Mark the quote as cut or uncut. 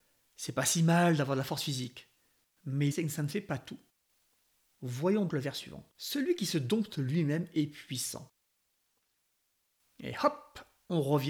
cut